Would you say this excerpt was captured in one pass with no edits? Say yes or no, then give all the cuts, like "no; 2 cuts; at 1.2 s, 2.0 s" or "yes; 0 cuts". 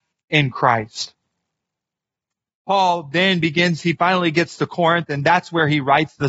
yes; 0 cuts